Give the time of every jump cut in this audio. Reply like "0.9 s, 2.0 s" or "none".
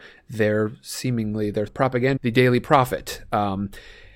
1.7 s, 2.2 s